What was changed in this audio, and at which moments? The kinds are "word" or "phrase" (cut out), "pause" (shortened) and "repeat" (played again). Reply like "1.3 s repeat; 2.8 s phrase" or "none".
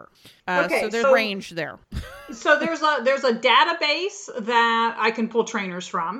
1.0 s word

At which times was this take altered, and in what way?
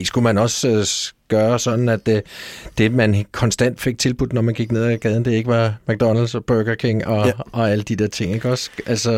none

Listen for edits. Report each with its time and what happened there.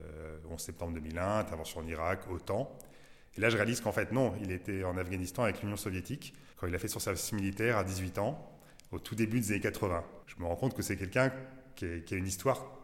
6.5 s pause

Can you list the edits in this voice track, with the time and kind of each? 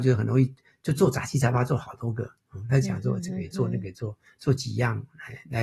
none

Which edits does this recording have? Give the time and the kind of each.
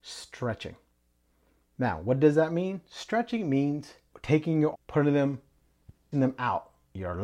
4.7 s word; 6.1 s word

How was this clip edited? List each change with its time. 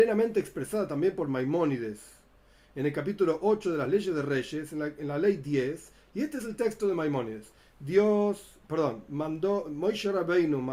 none

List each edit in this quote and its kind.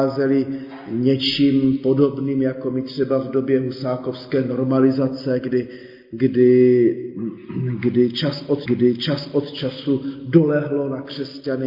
8.7 s repeat

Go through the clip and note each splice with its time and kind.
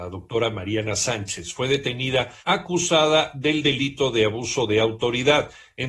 2.4 s pause

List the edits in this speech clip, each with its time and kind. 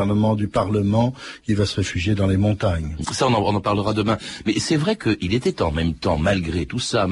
none

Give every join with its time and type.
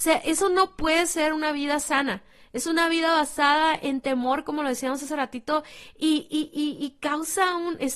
none

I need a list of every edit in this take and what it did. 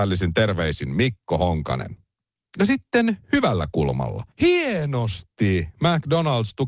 3.2 s pause; 4.3 s pause

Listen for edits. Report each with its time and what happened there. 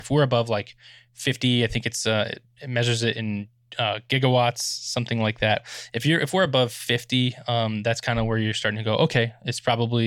none

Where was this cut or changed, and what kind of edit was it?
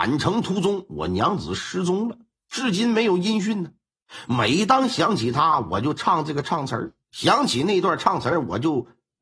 none

